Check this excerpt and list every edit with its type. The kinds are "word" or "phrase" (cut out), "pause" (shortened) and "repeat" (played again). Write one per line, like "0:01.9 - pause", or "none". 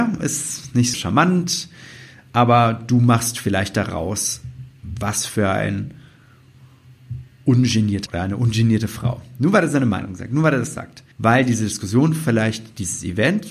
0:00.9 - word
0:08.1 - word
0:11.1 - pause